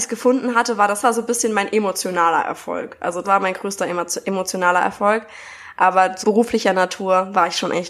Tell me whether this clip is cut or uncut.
cut